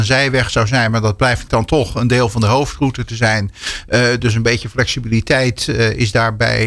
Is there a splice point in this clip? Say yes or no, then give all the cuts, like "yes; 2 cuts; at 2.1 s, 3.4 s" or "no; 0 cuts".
yes; 1 cut; at 1.5 s